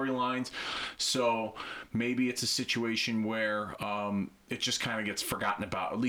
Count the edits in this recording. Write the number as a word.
zero